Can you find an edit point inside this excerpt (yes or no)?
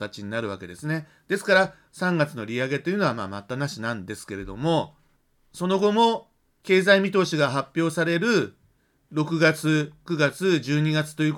no